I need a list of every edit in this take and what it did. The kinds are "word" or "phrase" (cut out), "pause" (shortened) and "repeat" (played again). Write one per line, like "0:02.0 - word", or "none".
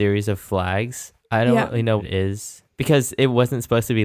0:01.2 - pause
0:02.0 - word
0:02.7 - pause